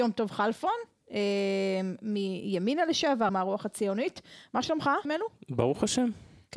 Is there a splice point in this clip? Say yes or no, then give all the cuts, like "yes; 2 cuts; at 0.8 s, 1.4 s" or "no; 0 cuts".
yes; 2 cuts; at 3.3 s, 5.0 s